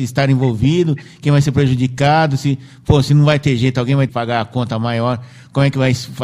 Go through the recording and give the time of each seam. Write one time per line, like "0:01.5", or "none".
0:04.1